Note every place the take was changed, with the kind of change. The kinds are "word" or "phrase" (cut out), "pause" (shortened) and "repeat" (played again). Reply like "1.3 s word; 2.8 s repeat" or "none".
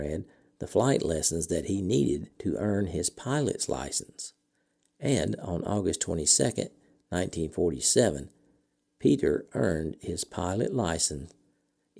2.3 s pause